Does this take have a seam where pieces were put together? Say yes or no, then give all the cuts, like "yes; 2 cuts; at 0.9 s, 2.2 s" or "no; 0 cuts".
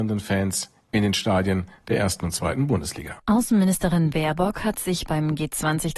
yes; 1 cut; at 3.2 s